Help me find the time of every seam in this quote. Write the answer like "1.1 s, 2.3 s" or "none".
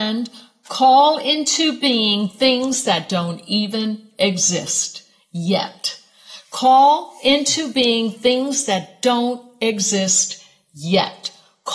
none